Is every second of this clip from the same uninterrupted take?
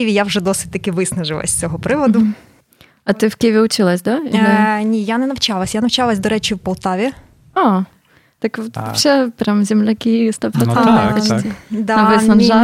yes; 0 cuts

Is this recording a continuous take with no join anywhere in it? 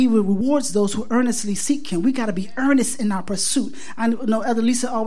yes; 0 cuts

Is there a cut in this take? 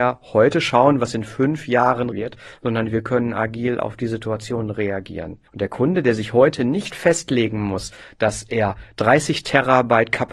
yes; 2 cuts; at 2.1 s, 5.5 s

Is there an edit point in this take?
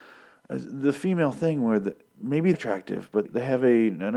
yes; 2 cuts; at 2.5 s, 3.2 s

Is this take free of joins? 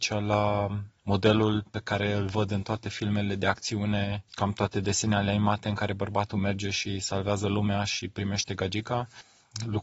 no; 2 cuts; at 1.0 s, 4.3 s

